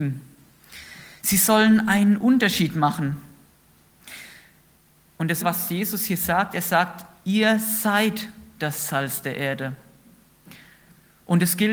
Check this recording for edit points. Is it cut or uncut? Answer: cut